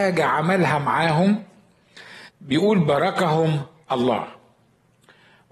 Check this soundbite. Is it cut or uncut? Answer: cut